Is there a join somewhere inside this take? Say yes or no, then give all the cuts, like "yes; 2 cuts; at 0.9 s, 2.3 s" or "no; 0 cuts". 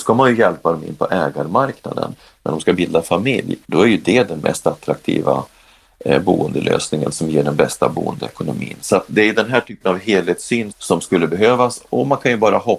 yes; 2 cuts; at 3.6 s, 10.7 s